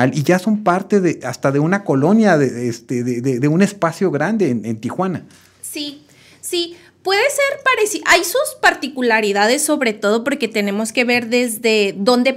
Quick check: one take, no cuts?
yes; 0 cuts

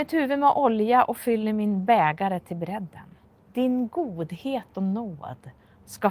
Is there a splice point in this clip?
yes; 1 cut; at 3.3 s

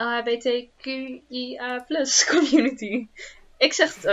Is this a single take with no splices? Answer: yes; 0 cuts

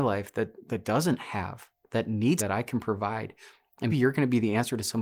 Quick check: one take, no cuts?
no; 2 cuts; at 2.4 s, 3.9 s

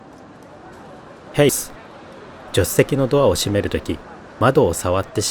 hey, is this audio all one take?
no; 1 cut; at 1.5 s

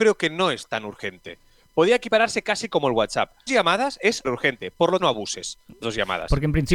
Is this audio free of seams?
no; 5 cuts; at 2.4 s, 3.5 s, 4.2 s, 5.0 s, 5.8 s

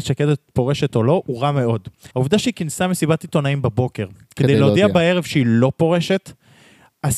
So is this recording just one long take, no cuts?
no; 1 cut; at 2.1 s

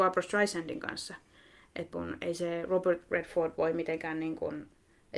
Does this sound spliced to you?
yes; 1 cut; at 1.9 s

